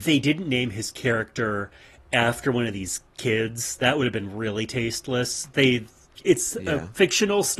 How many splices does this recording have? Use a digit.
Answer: 1